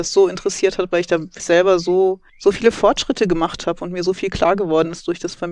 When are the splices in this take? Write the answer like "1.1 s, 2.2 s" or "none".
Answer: 1.4 s, 2.3 s